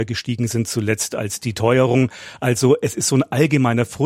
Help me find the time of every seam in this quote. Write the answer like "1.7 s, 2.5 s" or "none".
none